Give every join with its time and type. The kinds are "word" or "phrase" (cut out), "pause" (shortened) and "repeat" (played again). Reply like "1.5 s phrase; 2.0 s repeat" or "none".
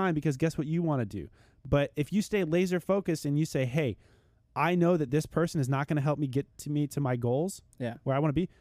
none